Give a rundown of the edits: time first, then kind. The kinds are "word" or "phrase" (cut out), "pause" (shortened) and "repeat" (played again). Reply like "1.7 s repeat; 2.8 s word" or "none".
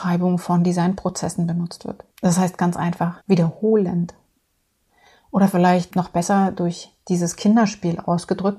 2.1 s pause; 3.2 s pause; 5.9 s word